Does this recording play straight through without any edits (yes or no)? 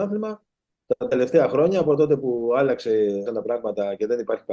no